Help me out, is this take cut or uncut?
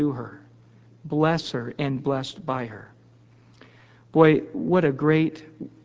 cut